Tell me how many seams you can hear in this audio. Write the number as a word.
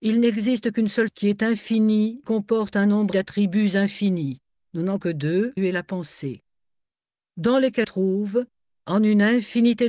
six